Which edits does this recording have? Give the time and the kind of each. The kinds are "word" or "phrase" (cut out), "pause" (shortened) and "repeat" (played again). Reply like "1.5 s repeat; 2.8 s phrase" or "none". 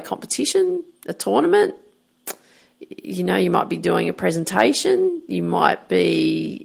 none